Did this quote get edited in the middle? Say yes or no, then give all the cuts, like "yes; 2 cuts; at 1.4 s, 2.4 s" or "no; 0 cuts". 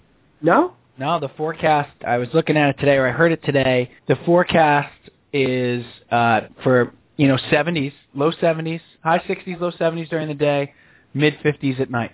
yes; 2 cuts; at 2.0 s, 4.0 s